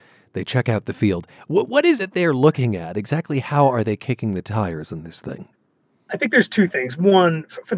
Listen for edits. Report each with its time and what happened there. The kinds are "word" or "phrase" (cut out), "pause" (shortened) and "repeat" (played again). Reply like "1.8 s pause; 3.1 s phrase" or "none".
2.0 s word

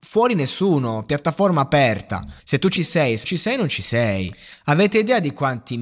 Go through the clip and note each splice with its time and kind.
2.4 s pause; 2.8 s phrase; 3.2 s word

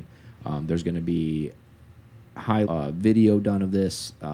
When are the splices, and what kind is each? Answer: 2.7 s word

